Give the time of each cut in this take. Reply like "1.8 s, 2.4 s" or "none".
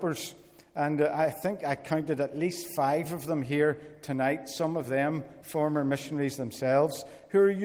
none

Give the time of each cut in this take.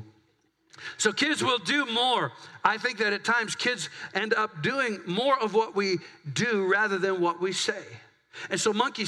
none

